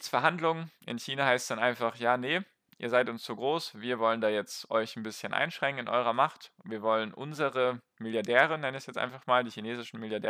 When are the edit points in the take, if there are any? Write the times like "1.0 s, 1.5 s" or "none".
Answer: none